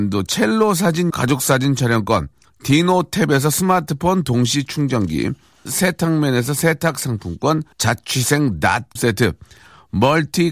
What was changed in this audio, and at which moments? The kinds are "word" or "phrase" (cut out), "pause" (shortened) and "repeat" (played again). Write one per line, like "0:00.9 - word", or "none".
0:01.1 - word
0:02.4 - pause
0:05.7 - word
0:07.7 - pause
0:09.0 - phrase